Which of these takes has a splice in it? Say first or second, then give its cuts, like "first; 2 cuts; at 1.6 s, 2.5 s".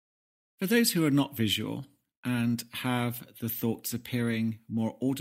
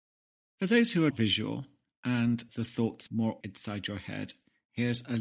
second; 4 cuts; at 1.1 s, 2.5 s, 3.1 s, 3.4 s